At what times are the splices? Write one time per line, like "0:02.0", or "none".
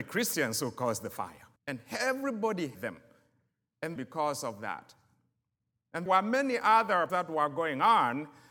0:01.6
0:02.7
0:04.0
0:06.1
0:07.1